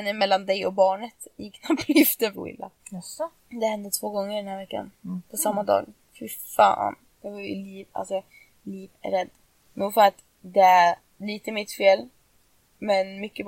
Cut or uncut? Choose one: cut